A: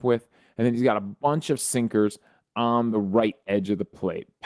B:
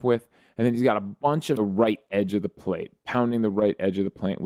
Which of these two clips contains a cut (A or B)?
B